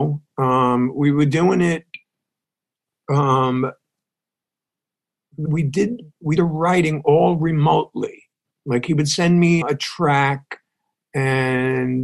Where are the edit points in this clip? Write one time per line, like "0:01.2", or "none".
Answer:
0:05.5
0:06.4
0:09.6

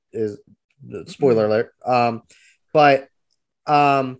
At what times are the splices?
none

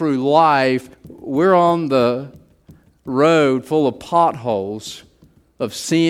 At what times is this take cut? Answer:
0:00.9

